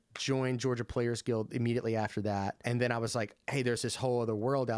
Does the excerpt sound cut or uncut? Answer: uncut